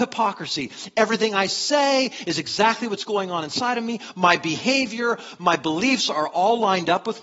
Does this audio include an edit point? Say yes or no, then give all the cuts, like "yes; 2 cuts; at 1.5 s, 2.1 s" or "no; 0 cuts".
no; 0 cuts